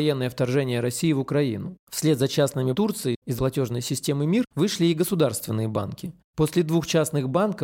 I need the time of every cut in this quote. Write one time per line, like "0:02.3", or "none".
0:02.7
0:03.4